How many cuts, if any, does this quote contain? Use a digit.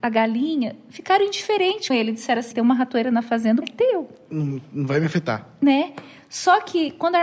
3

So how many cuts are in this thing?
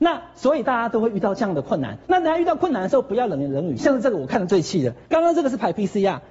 2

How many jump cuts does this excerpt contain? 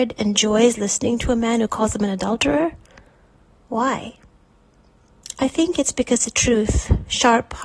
0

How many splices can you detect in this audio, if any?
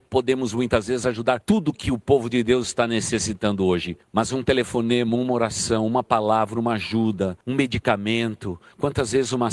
0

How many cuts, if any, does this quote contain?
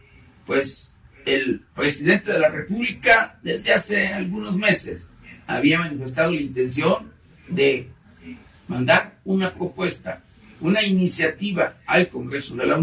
0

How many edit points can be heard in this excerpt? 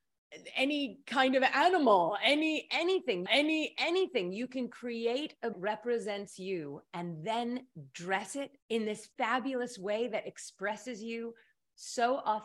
4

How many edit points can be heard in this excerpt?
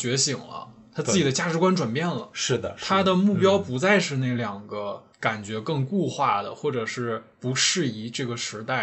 1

